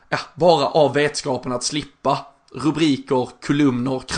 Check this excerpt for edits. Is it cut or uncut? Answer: uncut